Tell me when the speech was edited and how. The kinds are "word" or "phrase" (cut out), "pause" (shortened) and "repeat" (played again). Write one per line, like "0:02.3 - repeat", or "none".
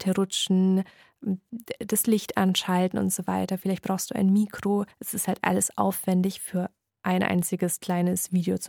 0:04.9 - pause